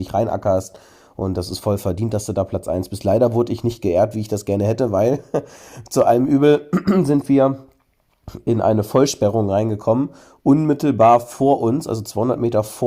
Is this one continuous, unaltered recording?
yes; 0 cuts

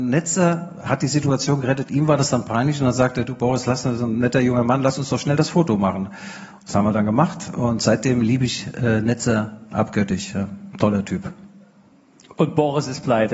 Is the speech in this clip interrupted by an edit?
no; 0 cuts

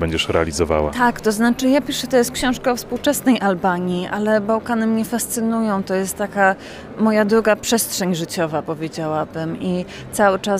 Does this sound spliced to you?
no; 0 cuts

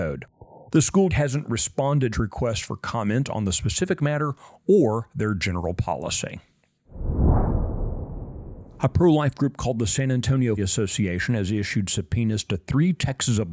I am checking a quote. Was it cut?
yes; 3 cuts; at 1.1 s, 2.1 s, 10.6 s

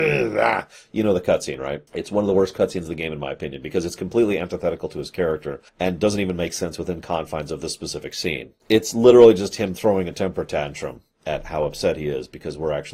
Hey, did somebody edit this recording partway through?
yes; 3 cuts; at 1.9 s, 5.7 s, 8.6 s

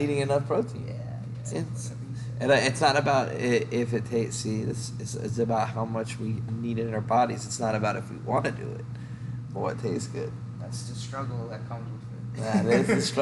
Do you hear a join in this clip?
yes; 2 cuts; at 1.5 s, 6.5 s

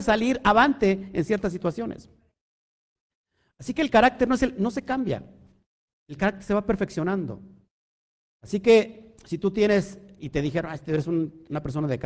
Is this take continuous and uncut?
yes; 0 cuts

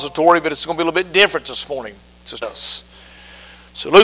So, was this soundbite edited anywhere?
yes; 1 cut; at 2.4 s

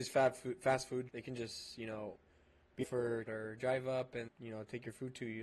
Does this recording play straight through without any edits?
no; 5 cuts; at 1.1 s, 2.8 s, 3.3 s, 3.6 s, 4.3 s

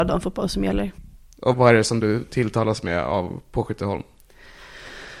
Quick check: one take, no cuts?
no; 1 cut; at 1.5 s

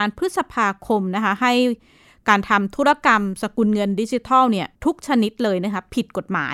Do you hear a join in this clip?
yes; 1 cut; at 4.7 s

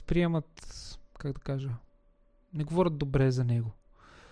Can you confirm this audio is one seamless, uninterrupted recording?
yes; 0 cuts

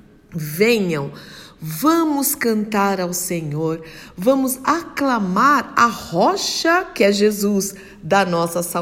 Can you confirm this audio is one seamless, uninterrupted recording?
yes; 0 cuts

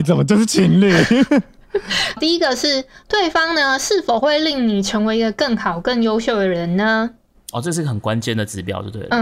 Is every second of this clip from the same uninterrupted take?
no; 1 cut; at 2.2 s

